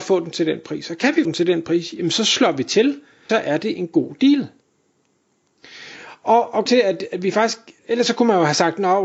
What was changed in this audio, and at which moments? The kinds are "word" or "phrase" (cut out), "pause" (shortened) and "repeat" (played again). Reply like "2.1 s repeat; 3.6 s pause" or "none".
1.2 s word; 3.3 s phrase; 6.7 s word; 7.8 s word